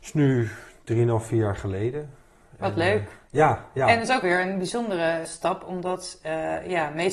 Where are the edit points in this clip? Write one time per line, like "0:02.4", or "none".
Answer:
0:04.2
0:05.3